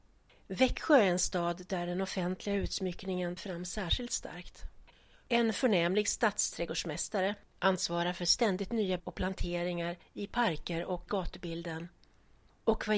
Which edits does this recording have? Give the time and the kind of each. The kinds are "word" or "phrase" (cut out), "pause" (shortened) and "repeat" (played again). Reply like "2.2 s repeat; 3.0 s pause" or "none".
3.4 s word; 9.0 s word; 11.1 s word